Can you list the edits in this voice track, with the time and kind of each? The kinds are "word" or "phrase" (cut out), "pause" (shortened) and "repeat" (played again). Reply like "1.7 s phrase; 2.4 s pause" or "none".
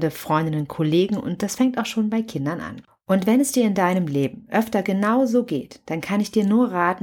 none